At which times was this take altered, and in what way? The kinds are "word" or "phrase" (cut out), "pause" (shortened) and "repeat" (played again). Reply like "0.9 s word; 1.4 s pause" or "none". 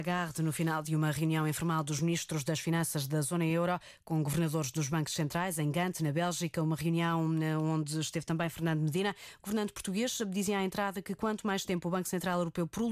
none